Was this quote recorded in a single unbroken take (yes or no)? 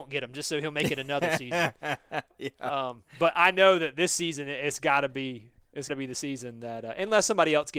no